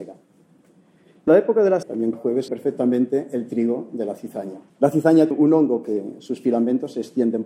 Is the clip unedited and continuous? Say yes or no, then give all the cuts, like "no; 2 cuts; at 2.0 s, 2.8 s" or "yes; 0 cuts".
no; 6 cuts; at 1.3 s, 1.8 s, 2.1 s, 2.5 s, 4.7 s, 5.3 s